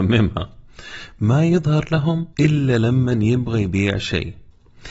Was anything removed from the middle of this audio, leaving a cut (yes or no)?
yes